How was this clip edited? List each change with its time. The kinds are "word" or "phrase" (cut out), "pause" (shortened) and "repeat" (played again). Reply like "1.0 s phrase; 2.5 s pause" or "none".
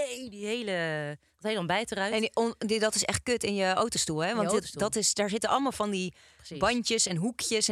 none